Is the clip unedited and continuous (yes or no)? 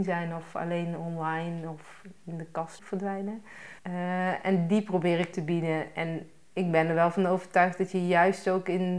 no